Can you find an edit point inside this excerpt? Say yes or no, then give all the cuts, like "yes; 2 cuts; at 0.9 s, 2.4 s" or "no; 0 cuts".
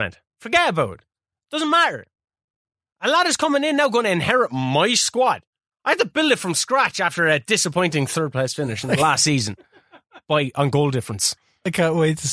no; 0 cuts